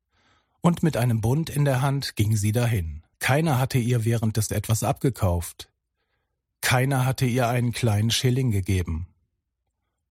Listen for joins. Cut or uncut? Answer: cut